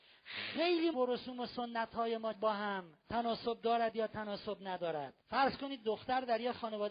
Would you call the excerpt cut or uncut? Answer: cut